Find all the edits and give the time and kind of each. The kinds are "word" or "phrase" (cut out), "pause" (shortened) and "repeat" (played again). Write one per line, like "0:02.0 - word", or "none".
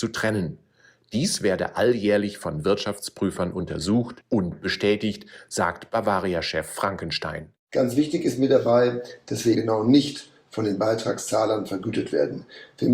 0:04.2 - pause
0:09.5 - word